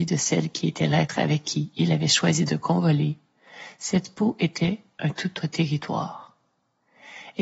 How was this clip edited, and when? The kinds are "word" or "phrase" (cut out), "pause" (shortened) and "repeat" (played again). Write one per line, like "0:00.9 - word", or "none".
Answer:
0:05.4 - word